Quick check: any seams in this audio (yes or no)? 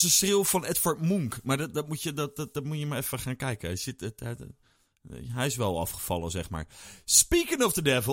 no